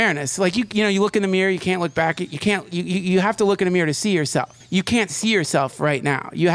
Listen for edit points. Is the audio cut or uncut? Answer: cut